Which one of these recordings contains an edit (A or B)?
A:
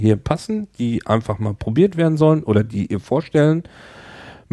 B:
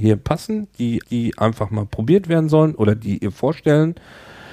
B